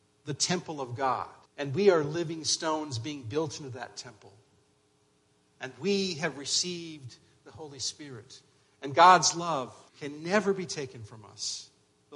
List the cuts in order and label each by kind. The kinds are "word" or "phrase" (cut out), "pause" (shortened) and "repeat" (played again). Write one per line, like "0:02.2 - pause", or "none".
0:01.5 - pause
0:09.9 - pause